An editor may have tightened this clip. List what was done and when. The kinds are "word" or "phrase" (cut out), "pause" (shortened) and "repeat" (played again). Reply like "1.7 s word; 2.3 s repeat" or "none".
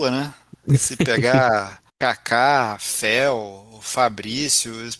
1.9 s pause